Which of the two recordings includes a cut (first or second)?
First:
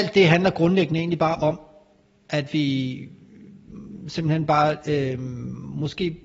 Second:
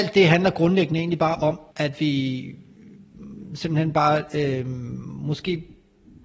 second